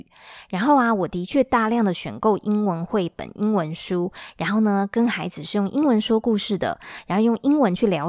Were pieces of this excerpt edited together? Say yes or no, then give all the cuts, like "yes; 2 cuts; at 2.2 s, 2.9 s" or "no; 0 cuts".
no; 0 cuts